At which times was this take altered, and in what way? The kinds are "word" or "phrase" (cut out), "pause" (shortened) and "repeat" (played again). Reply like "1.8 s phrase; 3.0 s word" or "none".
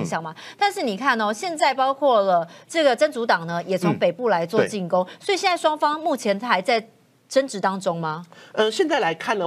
none